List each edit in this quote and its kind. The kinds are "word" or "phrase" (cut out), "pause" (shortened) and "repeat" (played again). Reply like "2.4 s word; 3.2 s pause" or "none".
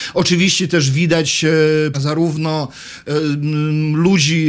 1.9 s word